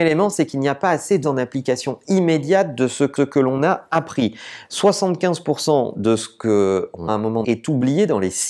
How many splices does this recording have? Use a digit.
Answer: 4